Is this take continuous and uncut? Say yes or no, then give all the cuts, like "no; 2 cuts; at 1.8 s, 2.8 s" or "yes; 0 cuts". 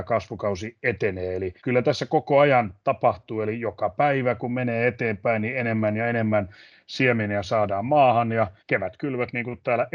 no; 2 cuts; at 1.6 s, 8.6 s